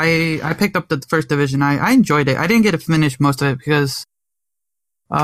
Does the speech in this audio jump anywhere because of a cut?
no; 0 cuts

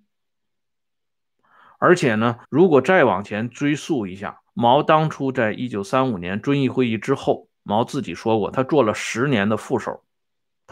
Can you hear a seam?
yes; 2 cuts; at 2.4 s, 4.5 s

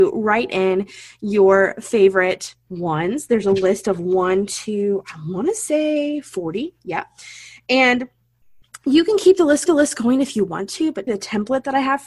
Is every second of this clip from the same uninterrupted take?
no; 2 cuts; at 9.7 s, 11.1 s

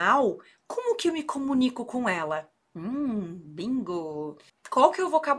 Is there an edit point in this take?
no; 0 cuts

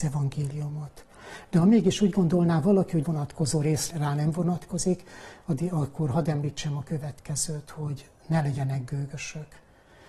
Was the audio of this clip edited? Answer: yes; 2 cuts; at 3.0 s, 3.9 s

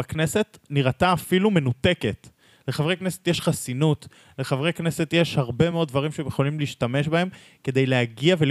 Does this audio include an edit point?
no; 0 cuts

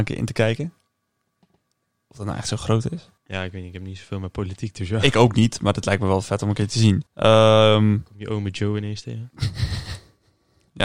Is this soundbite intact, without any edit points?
no; 2 cuts; at 3.2 s, 7.1 s

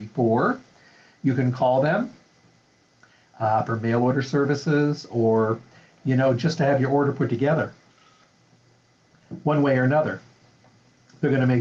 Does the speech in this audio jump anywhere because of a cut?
no; 0 cuts

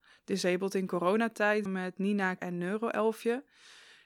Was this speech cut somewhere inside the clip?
yes; 2 cuts; at 1.7 s, 2.4 s

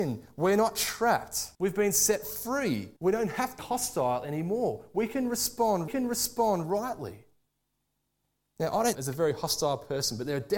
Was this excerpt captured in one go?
no; 5 cuts; at 1.5 s, 3.0 s, 3.6 s, 5.9 s, 8.9 s

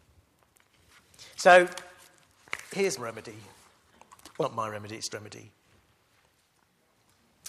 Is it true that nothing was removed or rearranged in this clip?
no; 3 cuts; at 3.0 s, 4.4 s, 5.1 s

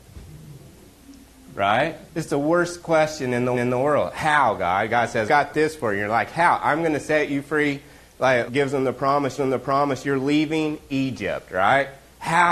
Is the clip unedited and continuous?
no; 5 cuts; at 2.1 s, 3.5 s, 5.3 s, 8.5 s, 9.4 s

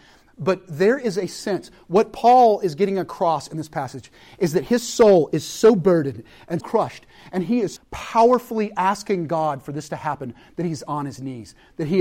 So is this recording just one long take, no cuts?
no; 2 cuts; at 6.6 s, 7.8 s

